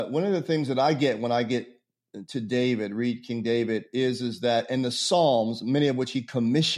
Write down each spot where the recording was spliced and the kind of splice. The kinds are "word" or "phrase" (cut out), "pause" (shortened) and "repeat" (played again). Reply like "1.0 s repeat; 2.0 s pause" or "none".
none